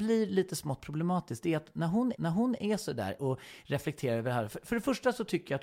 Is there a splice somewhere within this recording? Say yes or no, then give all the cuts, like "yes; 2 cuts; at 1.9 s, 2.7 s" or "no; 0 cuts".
yes; 2 cuts; at 2.2 s, 3.2 s